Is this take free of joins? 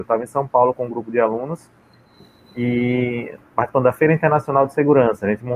yes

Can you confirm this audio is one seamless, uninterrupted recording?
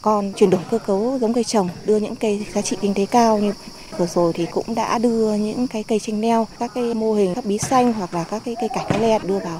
yes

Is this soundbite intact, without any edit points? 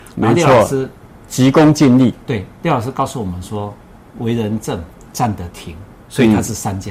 yes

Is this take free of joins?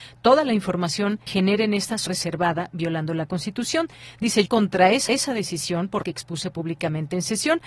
no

